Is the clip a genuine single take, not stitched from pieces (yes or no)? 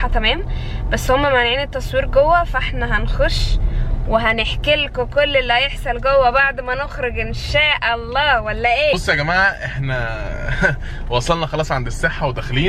yes